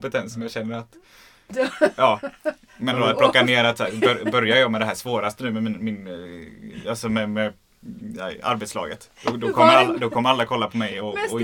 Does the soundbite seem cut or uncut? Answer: uncut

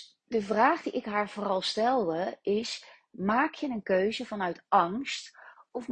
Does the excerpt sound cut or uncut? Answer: uncut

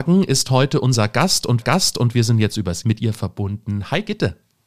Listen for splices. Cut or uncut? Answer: cut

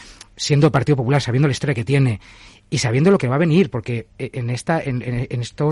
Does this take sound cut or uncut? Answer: uncut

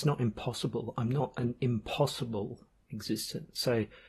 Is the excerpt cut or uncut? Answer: uncut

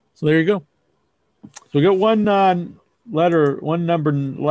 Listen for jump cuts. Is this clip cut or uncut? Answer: uncut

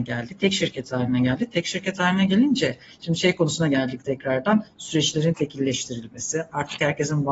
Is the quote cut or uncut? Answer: uncut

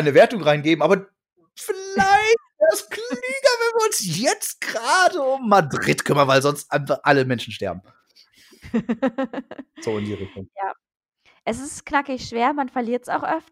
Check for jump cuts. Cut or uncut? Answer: uncut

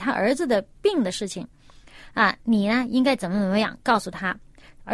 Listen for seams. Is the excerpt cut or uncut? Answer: uncut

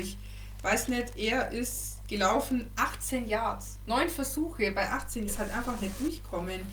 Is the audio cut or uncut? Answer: cut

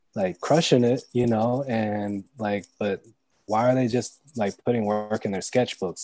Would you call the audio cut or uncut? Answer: uncut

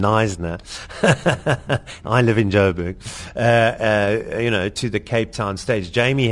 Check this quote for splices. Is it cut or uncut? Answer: uncut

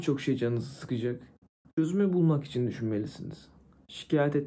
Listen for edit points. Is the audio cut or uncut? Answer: uncut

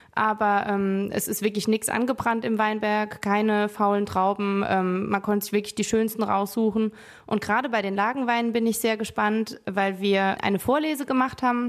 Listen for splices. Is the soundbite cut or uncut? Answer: uncut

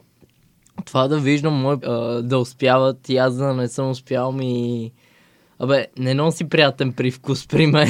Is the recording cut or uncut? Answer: cut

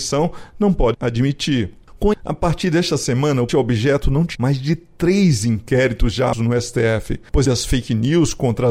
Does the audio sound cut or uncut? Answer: cut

